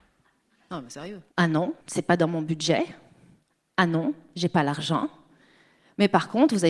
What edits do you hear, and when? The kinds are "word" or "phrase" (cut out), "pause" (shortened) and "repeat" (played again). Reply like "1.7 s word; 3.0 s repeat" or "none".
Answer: 1.3 s pause; 1.8 s pause